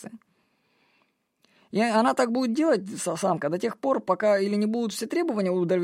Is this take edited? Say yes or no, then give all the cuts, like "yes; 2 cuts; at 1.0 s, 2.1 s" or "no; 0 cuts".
no; 0 cuts